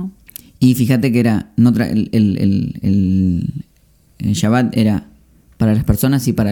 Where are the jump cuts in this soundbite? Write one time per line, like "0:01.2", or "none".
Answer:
0:01.7